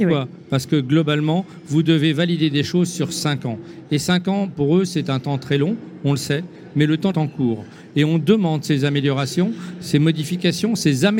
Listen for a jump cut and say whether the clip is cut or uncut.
cut